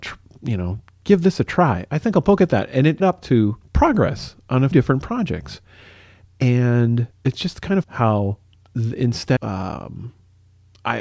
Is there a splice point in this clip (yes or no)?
yes